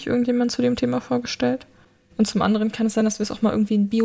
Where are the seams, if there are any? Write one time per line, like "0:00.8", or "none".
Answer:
none